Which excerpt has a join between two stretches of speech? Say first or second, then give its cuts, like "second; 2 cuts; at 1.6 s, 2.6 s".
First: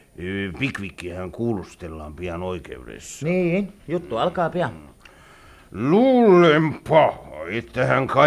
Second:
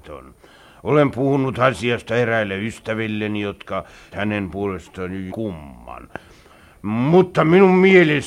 second; 2 cuts; at 4.1 s, 5.3 s